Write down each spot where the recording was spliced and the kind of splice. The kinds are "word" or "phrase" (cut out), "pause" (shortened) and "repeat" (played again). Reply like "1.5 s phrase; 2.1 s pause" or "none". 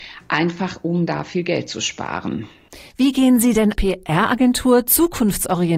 3.7 s word